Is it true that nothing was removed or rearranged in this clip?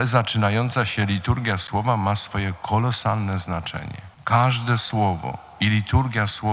no; 1 cut; at 4.1 s

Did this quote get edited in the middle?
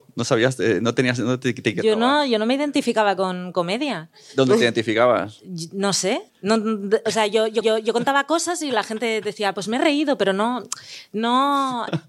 yes; 2 cuts; at 6.3 s, 7.6 s

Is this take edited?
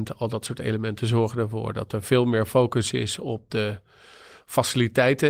no; 0 cuts

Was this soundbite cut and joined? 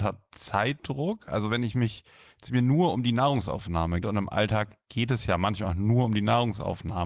yes; 1 cut; at 4.0 s

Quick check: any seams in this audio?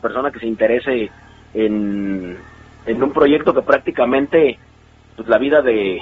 no; 0 cuts

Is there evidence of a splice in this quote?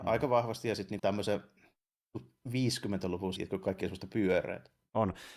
yes; 2 cuts; at 1.0 s, 3.4 s

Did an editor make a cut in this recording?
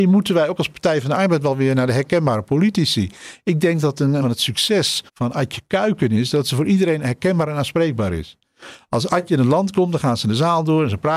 yes; 2 cuts; at 4.2 s, 5.1 s

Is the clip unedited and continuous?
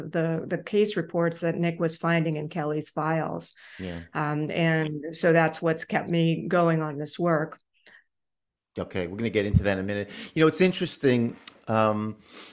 yes; 0 cuts

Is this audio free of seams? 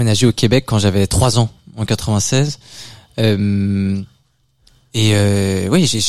yes; 0 cuts

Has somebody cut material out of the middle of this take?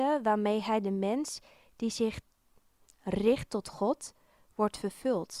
no; 0 cuts

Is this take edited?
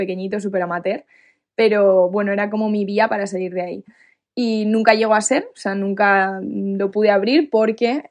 no; 0 cuts

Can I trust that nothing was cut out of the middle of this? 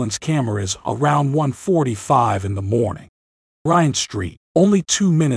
no; 2 cuts; at 3.7 s, 4.4 s

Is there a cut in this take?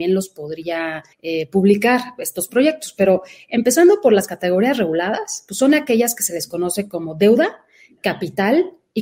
yes; 1 cut; at 1.1 s

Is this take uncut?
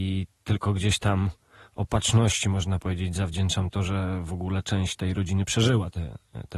yes; 0 cuts

